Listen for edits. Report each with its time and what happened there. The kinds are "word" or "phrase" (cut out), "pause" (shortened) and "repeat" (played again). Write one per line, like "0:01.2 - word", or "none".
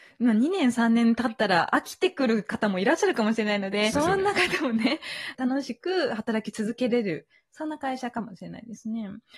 0:03.9 - phrase